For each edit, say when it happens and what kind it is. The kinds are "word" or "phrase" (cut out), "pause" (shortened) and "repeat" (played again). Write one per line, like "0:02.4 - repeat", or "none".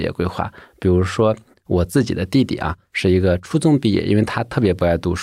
none